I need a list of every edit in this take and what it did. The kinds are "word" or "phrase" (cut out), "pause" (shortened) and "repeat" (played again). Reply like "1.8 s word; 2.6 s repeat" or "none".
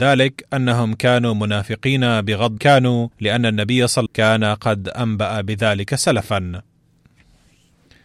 2.6 s phrase; 3.1 s pause; 4.1 s phrase